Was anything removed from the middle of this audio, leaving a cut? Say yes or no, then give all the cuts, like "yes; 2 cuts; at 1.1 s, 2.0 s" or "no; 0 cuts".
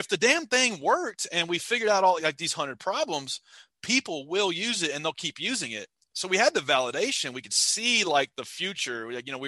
no; 0 cuts